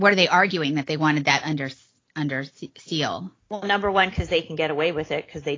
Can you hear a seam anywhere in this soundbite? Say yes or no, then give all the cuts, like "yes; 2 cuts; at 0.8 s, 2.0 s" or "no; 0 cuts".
no; 0 cuts